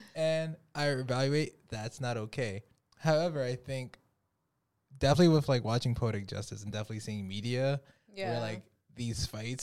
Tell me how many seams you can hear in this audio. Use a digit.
0